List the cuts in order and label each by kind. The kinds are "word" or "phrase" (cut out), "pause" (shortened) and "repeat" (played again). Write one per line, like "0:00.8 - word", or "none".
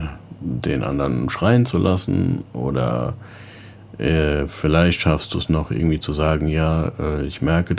none